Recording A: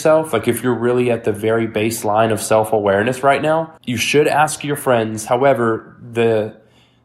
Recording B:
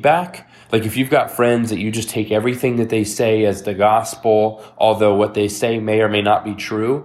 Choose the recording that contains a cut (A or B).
A